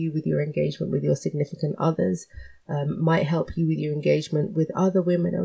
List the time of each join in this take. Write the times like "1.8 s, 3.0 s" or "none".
none